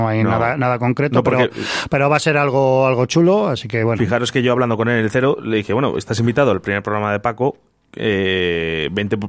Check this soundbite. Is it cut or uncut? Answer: uncut